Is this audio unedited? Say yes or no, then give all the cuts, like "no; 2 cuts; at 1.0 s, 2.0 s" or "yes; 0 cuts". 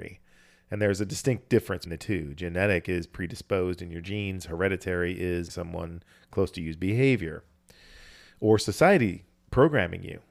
no; 2 cuts; at 1.9 s, 5.5 s